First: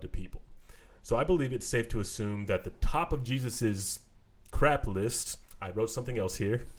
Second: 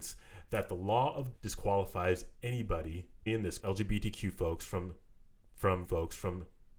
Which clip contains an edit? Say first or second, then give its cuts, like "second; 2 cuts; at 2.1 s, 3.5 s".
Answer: second; 4 cuts; at 1.3 s, 3.3 s, 3.6 s, 5.8 s